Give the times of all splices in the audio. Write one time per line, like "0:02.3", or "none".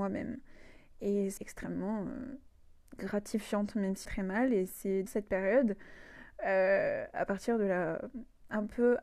0:01.4
0:04.1
0:05.1